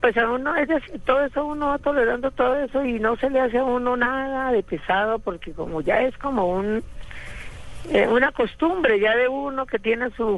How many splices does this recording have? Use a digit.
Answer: 0